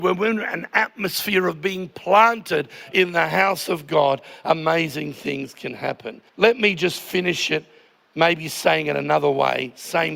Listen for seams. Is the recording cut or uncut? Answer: cut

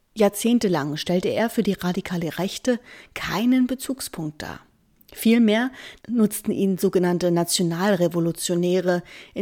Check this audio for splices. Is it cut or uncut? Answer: uncut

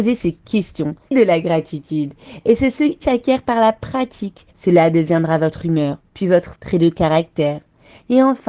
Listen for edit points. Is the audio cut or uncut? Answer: cut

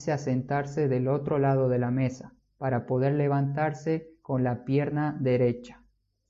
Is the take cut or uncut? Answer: uncut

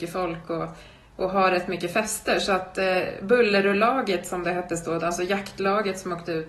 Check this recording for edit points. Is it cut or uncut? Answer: uncut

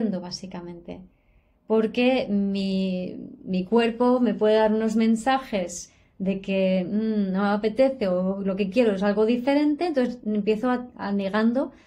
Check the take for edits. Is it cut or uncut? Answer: uncut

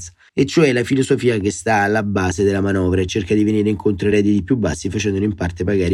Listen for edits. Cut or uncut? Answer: uncut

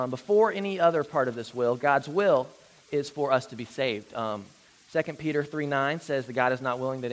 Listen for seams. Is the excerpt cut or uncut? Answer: uncut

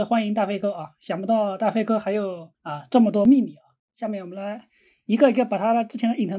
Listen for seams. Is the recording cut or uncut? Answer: cut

